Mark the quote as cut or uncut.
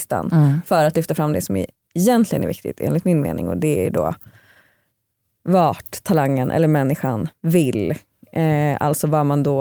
uncut